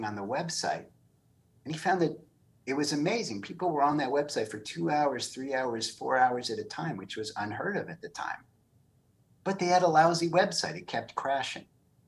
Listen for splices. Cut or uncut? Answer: uncut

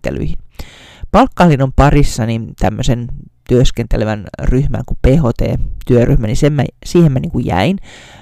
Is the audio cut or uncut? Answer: uncut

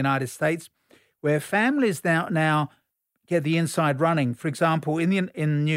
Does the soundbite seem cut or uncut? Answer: uncut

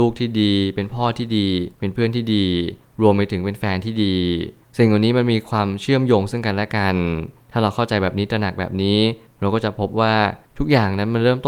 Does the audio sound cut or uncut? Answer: cut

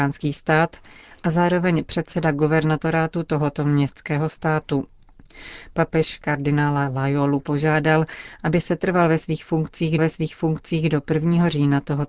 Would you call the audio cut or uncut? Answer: cut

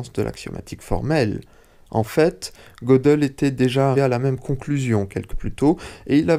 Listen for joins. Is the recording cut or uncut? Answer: cut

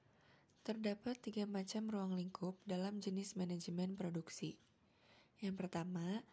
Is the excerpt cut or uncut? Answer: uncut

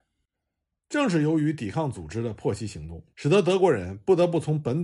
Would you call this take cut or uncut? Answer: cut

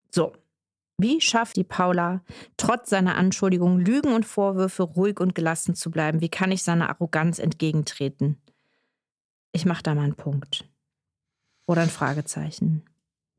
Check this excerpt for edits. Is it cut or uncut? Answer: cut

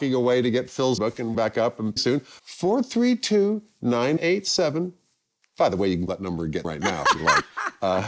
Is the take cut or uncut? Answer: cut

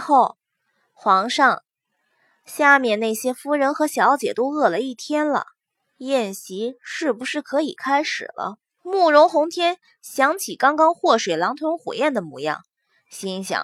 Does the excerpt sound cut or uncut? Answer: cut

